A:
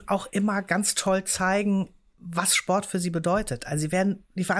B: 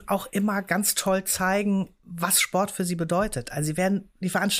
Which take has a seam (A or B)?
B